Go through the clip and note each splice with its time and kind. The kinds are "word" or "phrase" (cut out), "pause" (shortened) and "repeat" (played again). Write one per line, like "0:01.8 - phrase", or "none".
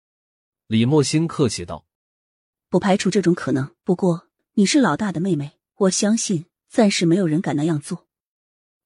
0:01.9 - pause
0:03.8 - pause
0:04.4 - pause
0:05.7 - pause